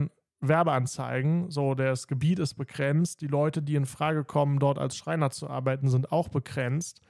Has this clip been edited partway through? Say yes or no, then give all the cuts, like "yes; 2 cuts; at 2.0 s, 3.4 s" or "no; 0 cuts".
no; 0 cuts